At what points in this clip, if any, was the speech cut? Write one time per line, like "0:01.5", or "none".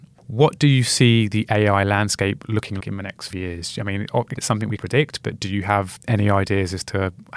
0:02.8
0:03.3
0:04.4
0:04.8